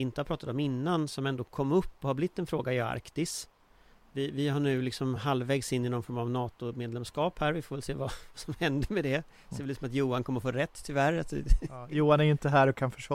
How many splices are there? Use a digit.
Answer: 0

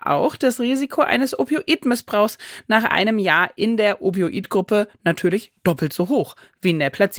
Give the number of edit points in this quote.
0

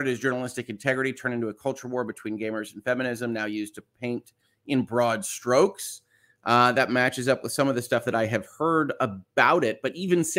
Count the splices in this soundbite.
0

